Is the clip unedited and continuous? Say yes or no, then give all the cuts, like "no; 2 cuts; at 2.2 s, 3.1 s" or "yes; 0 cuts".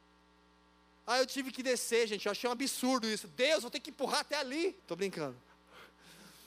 no; 1 cut; at 4.8 s